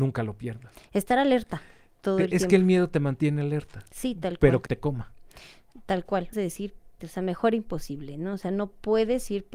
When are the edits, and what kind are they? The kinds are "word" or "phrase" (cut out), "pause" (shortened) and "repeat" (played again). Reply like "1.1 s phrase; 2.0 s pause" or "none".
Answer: 4.7 s word; 6.3 s word; 7.0 s word

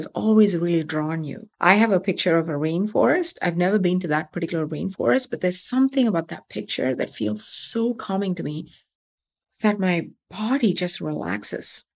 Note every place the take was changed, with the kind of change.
1.5 s pause; 9.0 s pause

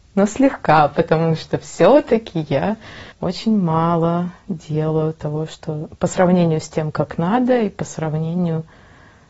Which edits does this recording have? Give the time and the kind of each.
3.1 s pause

